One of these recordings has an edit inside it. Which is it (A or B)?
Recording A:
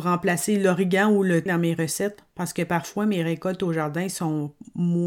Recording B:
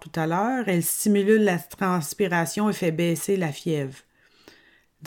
A